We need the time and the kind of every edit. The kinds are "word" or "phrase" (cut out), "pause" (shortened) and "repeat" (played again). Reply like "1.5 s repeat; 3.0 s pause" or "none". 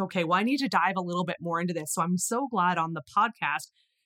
none